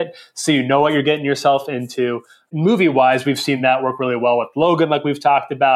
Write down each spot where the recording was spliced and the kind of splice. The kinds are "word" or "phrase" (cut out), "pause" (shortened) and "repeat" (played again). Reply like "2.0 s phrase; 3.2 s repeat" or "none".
none